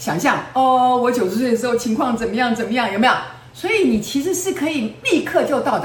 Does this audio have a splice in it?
no; 0 cuts

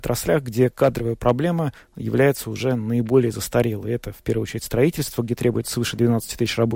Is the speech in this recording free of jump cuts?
yes; 0 cuts

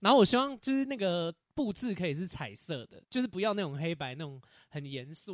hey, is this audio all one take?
no; 1 cut; at 3.0 s

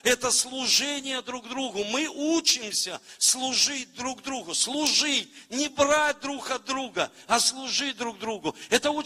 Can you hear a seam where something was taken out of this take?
no; 0 cuts

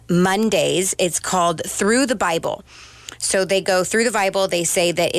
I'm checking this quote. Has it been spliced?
no; 0 cuts

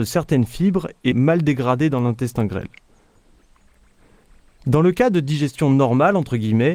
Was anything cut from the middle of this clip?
yes; 1 cut; at 1.1 s

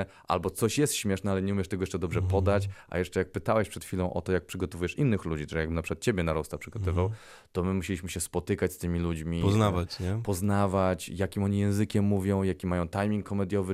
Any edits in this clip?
no; 0 cuts

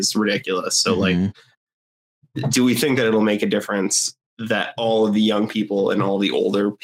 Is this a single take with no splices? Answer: no; 1 cut; at 4.3 s

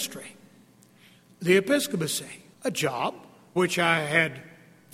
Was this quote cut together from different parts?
yes; 2 cuts; at 2.5 s, 3.6 s

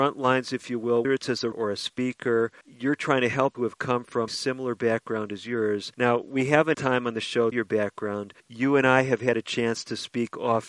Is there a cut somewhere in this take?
yes; 9 cuts; at 1.0 s, 1.5 s, 2.6 s, 3.5 s, 4.3 s, 5.9 s, 6.7 s, 7.5 s, 8.4 s

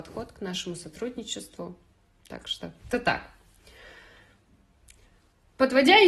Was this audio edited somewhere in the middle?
yes; 1 cut; at 2.9 s

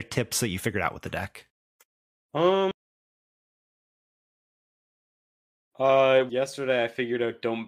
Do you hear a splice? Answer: yes; 2 cuts; at 1.9 s, 6.3 s

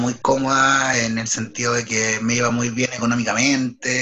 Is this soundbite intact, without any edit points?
yes; 0 cuts

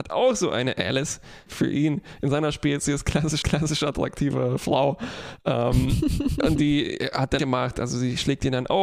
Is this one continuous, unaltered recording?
no; 3 cuts; at 1.5 s, 3.4 s, 7.4 s

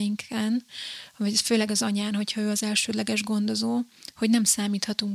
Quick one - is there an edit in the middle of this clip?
no; 0 cuts

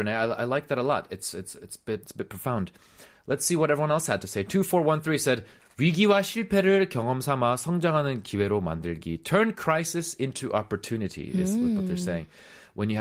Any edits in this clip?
yes; 1 cut; at 2.0 s

